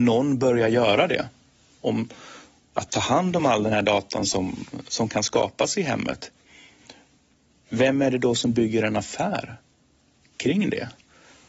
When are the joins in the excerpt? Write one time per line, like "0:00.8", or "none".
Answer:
none